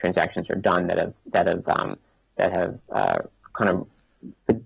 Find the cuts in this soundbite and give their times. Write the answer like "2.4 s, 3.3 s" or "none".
none